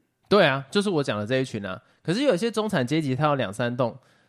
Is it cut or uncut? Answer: uncut